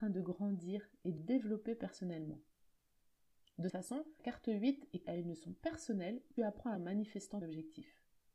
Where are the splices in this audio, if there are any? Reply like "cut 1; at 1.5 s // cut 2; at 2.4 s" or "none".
cut 1; at 1.2 s // cut 2; at 3.7 s // cut 3; at 4.2 s // cut 4; at 5.0 s // cut 5; at 6.4 s // cut 6; at 6.8 s // cut 7; at 7.4 s